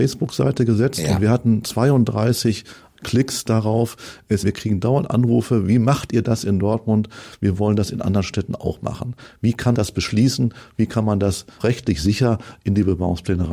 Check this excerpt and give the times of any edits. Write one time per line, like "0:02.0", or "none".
0:04.4
0:09.7
0:11.6

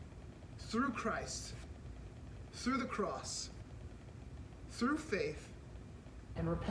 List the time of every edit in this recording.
none

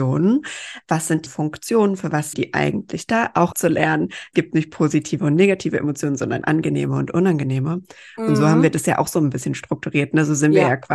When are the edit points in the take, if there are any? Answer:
0:01.3
0:02.3
0:03.5
0:04.3
0:06.4

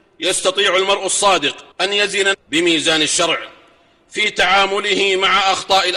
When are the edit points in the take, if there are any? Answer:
0:01.7
0:02.3

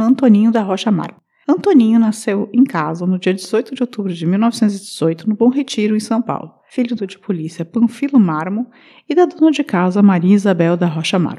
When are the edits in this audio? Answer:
0:07.0

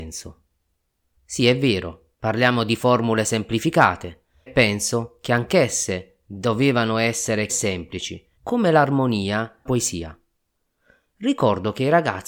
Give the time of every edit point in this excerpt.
0:02.1
0:04.5
0:07.5
0:08.4
0:09.7

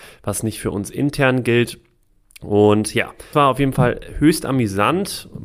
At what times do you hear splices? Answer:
0:03.3

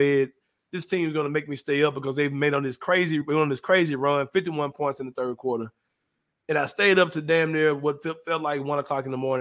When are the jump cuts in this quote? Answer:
none

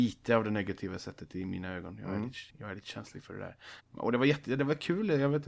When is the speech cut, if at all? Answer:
0:02.5
0:03.8

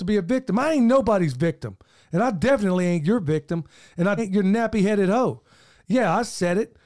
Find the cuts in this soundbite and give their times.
0:04.2

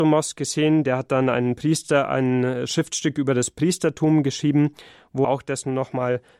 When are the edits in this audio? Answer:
0:05.2

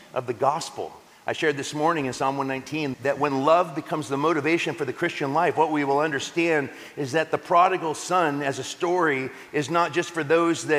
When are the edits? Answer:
0:02.9

